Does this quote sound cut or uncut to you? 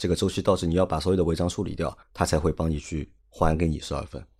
cut